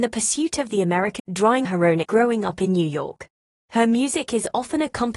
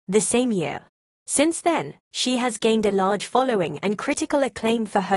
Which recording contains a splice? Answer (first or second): first